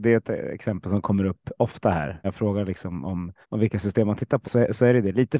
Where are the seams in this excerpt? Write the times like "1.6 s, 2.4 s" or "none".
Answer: 2.2 s, 3.4 s, 4.4 s

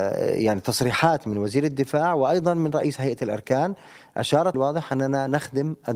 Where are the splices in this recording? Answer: 4.5 s

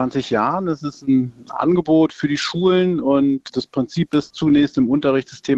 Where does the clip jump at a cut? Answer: 3.5 s, 4.3 s

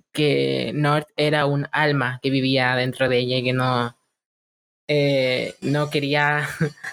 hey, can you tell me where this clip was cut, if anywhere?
none

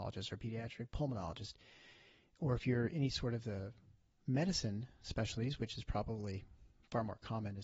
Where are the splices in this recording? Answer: none

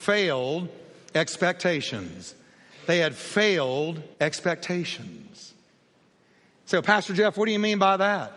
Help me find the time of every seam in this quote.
4.1 s

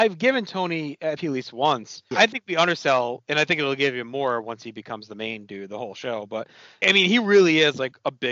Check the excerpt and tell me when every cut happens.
1.2 s, 2.1 s, 6.8 s

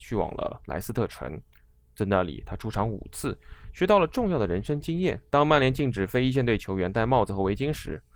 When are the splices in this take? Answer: 5.3 s

